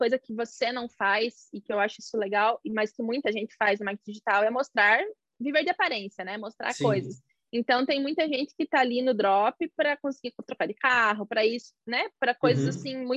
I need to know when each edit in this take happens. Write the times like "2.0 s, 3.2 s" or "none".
none

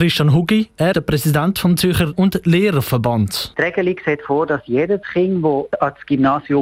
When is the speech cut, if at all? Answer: 0.9 s, 2.1 s

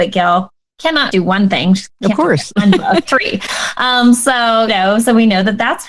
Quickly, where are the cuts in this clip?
1.1 s, 3.1 s, 4.7 s

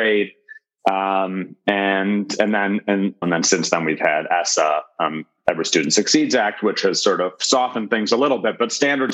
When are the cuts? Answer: 3.2 s

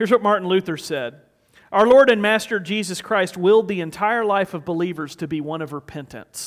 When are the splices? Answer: none

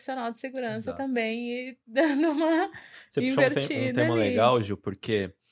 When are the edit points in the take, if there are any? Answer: none

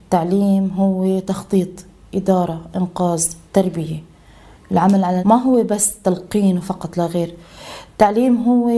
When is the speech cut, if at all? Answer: 3.5 s, 5.2 s

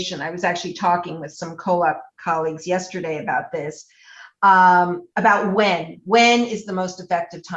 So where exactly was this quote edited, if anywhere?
none

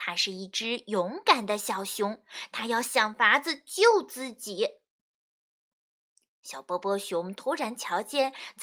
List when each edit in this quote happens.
none

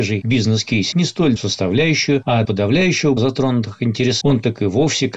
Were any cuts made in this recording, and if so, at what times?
0.9 s, 1.4 s, 2.4 s, 3.2 s, 4.2 s

